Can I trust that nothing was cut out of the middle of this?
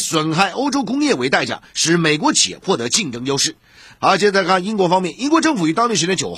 yes; 0 cuts

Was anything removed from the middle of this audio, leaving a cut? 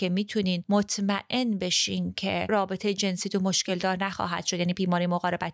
no; 0 cuts

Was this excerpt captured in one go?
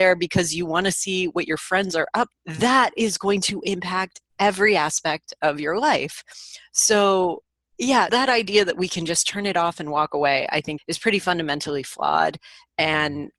no; 3 cuts; at 2.3 s, 8.1 s, 10.8 s

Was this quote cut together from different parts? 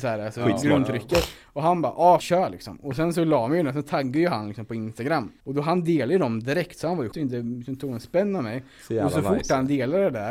yes; 3 cuts; at 2.2 s, 5.4 s, 7.1 s

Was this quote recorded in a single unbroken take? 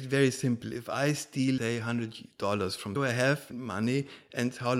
no; 3 cuts; at 1.6 s, 3.0 s, 3.5 s

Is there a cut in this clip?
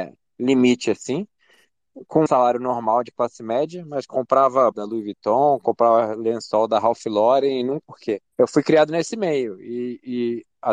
yes; 4 cuts; at 2.3 s, 4.7 s, 7.8 s, 8.3 s

